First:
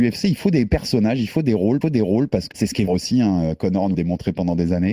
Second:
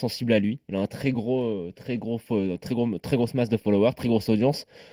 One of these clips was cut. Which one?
first; 4 cuts; at 1.8 s, 2.5 s, 2.9 s, 3.9 s

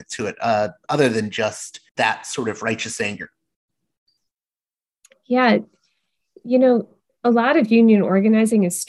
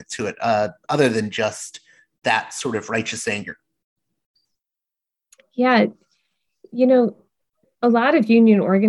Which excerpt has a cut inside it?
first; 2 cuts; at 1.9 s, 7.1 s

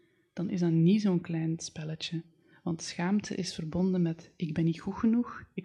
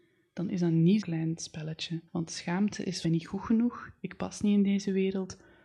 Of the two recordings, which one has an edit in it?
second; 3 cuts; at 1.0 s, 2.1 s, 3.0 s

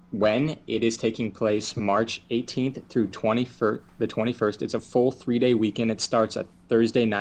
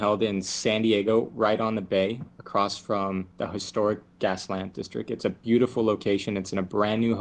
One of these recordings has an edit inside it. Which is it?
second; 1 cut; at 3.3 s

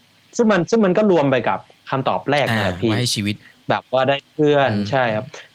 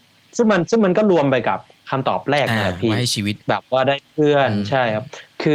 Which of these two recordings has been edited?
second; 1 cut; at 3.4 s

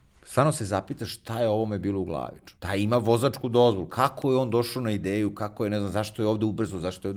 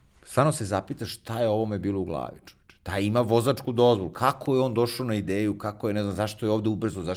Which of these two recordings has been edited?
first; 1 cut; at 2.5 s

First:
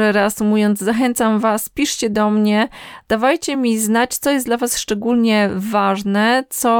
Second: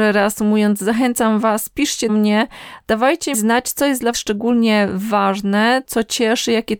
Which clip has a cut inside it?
second; 4 cuts; at 2.1 s, 3.3 s, 4.1 s, 5.8 s

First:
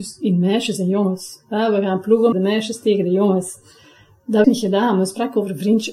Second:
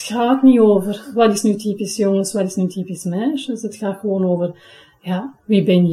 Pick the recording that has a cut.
first; 2 cuts; at 2.3 s, 4.4 s

